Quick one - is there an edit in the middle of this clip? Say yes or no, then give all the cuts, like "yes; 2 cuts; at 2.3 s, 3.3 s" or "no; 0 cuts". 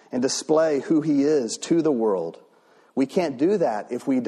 no; 0 cuts